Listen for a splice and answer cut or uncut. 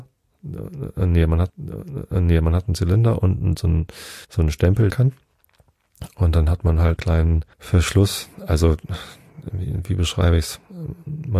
cut